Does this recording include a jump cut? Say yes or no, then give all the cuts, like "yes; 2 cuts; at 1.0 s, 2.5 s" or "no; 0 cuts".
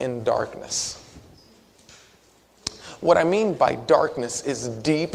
no; 0 cuts